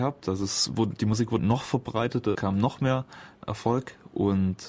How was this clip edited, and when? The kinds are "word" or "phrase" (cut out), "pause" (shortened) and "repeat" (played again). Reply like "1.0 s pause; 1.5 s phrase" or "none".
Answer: 1.4 s word; 2.3 s word; 3.4 s pause